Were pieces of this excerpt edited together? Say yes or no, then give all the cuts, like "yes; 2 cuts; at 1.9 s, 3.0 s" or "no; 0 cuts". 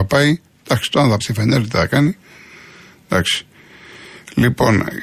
yes; 1 cut; at 1.2 s